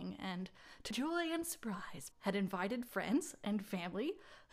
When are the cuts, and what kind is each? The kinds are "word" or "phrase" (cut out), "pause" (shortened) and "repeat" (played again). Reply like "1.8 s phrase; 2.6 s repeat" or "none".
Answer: 0.9 s word; 2.1 s word